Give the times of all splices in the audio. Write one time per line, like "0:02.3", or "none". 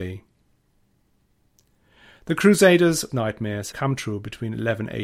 0:03.1
0:03.7